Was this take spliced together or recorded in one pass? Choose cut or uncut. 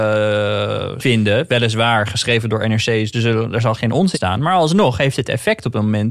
cut